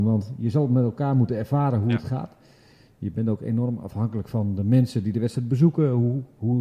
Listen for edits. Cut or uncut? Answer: uncut